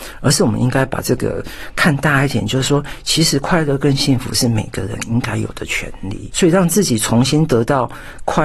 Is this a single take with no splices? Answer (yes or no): no